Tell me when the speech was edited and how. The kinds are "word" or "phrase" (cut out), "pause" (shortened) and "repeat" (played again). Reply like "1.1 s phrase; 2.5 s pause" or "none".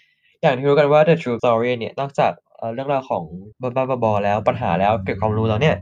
1.4 s word; 3.5 s pause